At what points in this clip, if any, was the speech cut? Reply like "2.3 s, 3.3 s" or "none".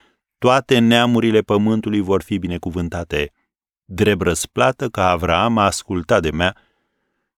6.3 s

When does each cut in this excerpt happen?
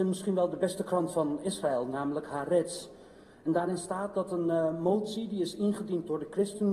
none

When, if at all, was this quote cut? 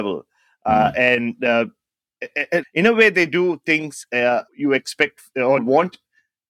2.6 s, 4.5 s, 5.6 s

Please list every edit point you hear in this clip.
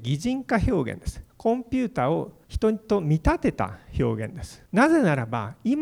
1.3 s, 2.4 s, 4.7 s

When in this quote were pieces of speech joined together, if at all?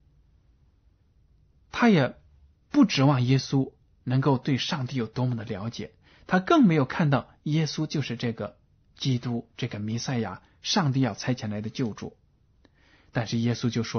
none

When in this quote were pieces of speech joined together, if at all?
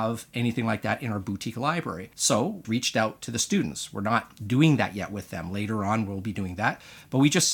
2.1 s, 2.6 s

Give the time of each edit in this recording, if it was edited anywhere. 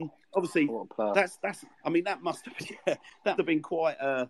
1.7 s, 3.4 s

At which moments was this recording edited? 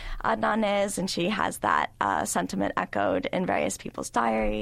none

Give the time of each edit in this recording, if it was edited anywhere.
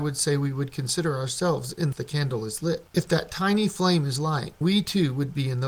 1.9 s, 2.9 s, 4.6 s

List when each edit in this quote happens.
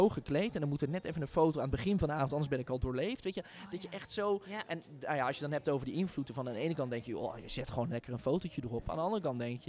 none

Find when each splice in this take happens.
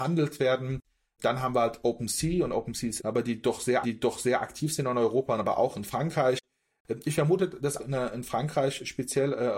3.0 s, 3.8 s, 7.8 s

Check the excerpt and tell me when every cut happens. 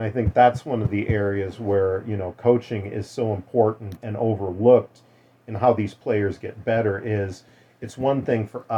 4.0 s

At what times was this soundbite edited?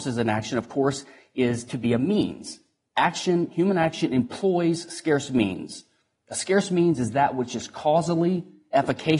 none

